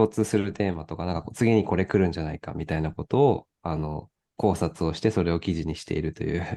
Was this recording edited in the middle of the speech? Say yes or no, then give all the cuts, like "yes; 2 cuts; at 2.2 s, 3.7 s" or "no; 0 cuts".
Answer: no; 0 cuts